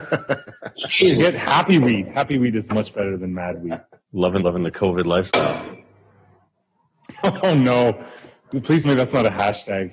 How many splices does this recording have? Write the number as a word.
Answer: two